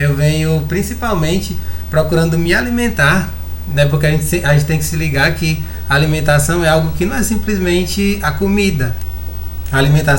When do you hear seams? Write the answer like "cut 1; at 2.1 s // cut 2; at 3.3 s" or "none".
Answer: none